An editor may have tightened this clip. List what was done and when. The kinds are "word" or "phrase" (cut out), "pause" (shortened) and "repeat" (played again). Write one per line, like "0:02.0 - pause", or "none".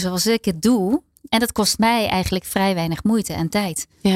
none